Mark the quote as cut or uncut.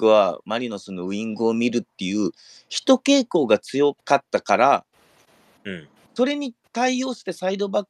cut